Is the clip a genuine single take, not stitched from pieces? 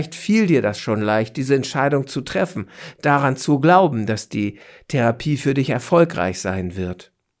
yes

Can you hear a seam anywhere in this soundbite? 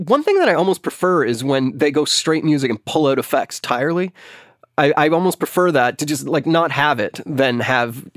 no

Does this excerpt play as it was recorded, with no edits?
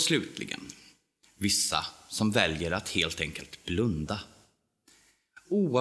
yes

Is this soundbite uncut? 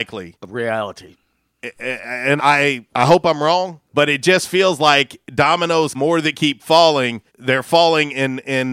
no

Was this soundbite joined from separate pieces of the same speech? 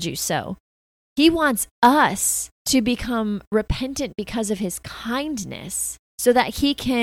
yes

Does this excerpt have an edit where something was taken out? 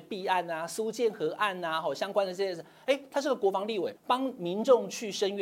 yes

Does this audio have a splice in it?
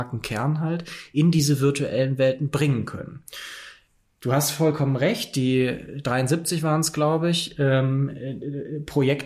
no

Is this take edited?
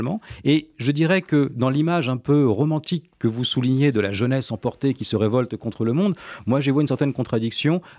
no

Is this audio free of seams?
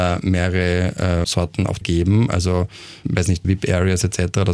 no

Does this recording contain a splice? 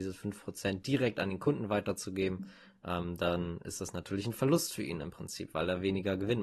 no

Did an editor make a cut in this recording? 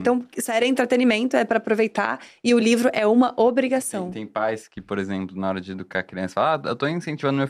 no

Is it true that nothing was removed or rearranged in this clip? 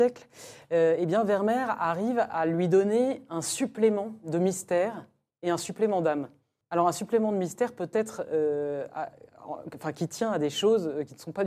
yes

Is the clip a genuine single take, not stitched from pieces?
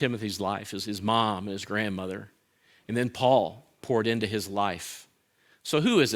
yes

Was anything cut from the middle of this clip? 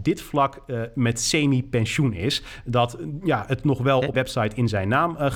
yes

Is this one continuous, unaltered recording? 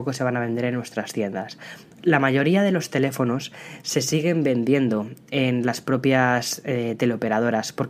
yes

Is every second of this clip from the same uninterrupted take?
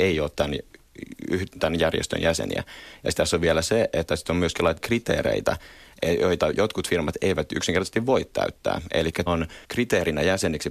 no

